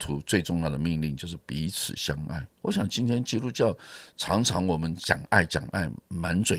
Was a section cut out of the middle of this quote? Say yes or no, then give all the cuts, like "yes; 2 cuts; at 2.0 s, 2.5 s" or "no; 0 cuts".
yes; 1 cut; at 2.6 s